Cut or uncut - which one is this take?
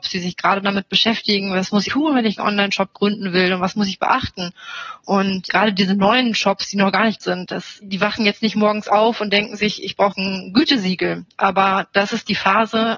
cut